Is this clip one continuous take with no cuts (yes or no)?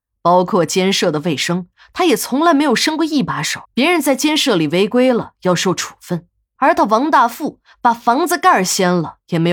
no